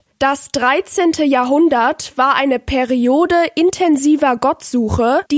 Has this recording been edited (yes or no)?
no